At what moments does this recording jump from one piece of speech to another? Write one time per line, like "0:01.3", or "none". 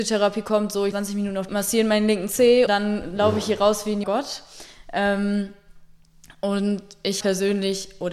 0:00.9
0:01.5
0:02.7
0:04.0
0:07.2